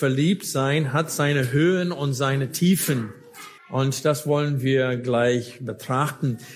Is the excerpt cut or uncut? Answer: cut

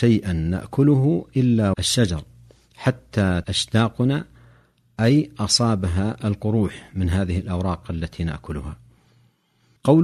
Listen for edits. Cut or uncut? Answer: cut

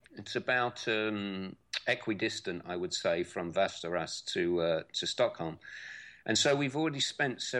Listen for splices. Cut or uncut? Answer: uncut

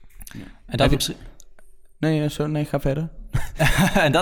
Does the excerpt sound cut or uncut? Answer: uncut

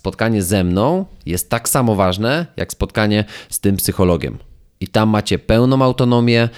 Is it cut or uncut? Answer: uncut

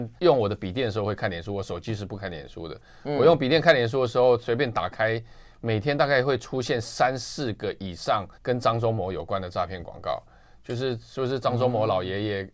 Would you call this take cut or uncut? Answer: cut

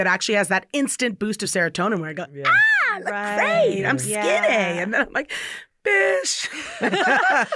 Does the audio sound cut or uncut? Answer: uncut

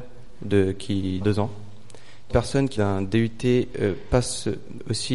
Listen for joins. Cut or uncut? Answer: cut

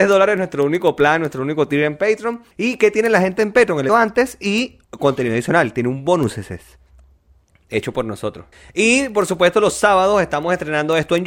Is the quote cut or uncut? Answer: cut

